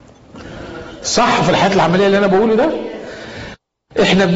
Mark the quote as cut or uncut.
uncut